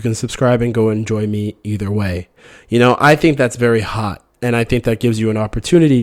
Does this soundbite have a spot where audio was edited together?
no; 0 cuts

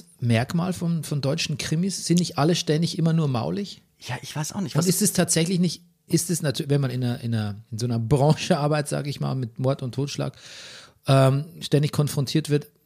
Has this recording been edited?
yes; 1 cut; at 7.6 s

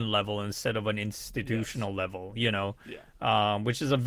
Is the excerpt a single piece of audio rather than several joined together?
yes; 0 cuts

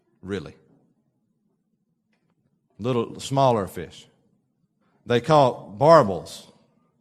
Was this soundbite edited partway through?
yes; 1 cut; at 4.8 s

